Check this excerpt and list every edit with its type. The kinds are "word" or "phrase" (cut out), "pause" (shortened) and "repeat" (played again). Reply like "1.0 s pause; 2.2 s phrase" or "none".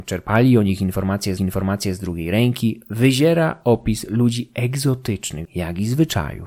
1.4 s repeat; 5.4 s phrase